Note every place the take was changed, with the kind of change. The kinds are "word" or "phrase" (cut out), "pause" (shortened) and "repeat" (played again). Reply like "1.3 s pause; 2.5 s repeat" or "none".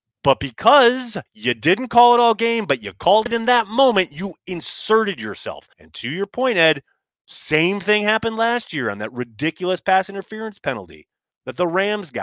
1.3 s pause; 5.7 s pause